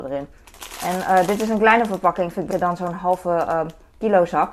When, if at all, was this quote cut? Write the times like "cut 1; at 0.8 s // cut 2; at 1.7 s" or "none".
cut 1; at 2.5 s